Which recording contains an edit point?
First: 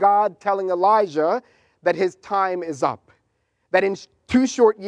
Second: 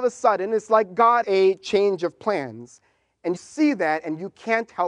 second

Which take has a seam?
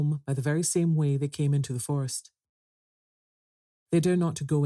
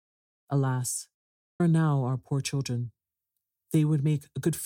second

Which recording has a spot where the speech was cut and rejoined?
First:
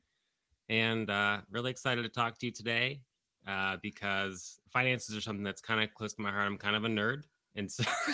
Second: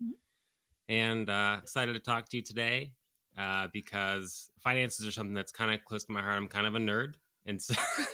second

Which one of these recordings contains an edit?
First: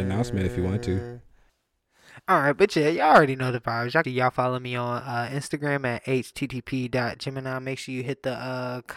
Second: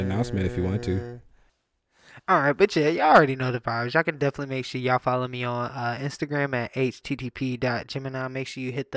first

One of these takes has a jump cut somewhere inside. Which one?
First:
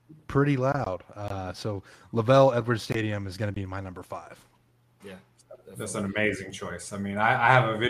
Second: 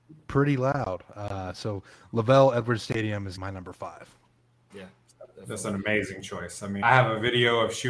second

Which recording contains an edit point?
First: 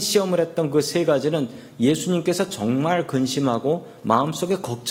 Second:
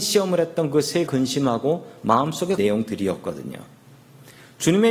second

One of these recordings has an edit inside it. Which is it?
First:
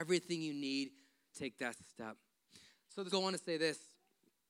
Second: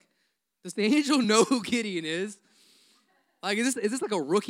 first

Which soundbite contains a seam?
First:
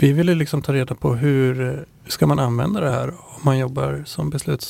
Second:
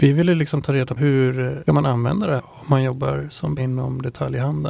second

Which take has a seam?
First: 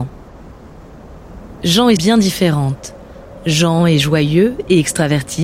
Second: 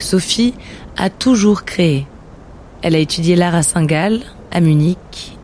first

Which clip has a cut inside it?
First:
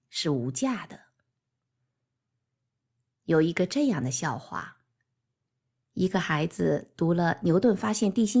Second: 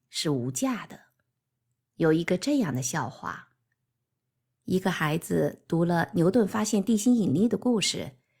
second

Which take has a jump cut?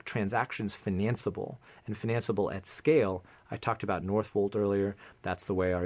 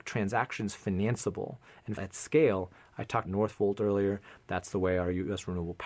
second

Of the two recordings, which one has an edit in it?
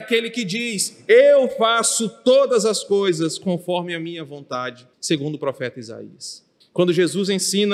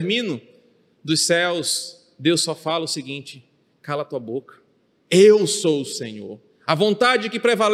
first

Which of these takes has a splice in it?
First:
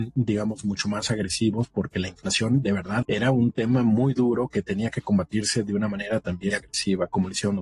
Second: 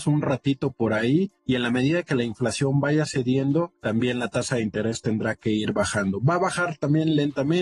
first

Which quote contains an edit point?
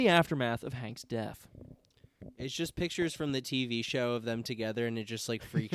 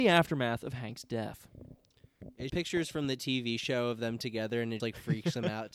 second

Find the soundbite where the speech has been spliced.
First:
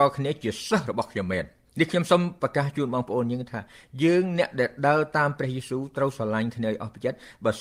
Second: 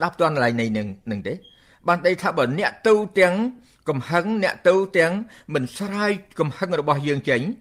first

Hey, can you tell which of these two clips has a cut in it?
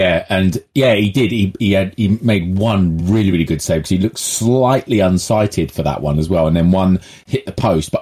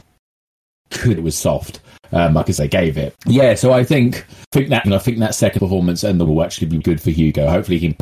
second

